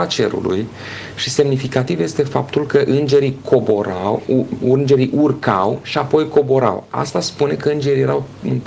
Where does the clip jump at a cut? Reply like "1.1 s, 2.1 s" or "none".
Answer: none